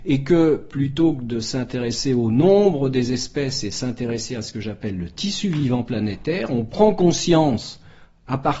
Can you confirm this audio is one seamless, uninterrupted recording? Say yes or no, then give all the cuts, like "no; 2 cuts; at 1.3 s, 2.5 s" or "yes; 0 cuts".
yes; 0 cuts